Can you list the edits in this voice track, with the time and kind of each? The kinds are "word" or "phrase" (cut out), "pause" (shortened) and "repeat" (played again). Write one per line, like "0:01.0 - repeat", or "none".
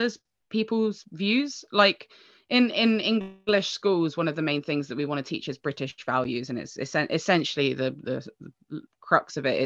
none